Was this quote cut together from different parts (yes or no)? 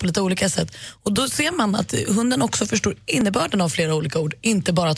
no